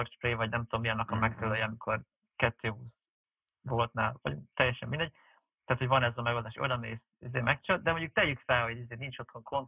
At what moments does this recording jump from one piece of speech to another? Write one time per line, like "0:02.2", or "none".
none